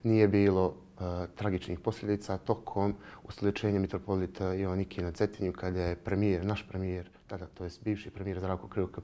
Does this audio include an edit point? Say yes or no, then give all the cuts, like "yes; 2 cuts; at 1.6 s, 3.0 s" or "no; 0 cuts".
no; 0 cuts